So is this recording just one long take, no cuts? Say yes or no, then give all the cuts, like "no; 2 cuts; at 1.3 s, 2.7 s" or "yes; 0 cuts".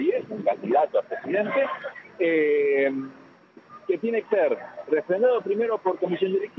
no; 1 cut; at 4.2 s